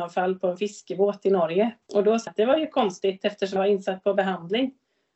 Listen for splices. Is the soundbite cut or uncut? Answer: cut